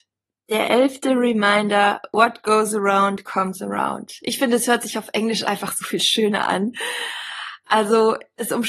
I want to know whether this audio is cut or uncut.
uncut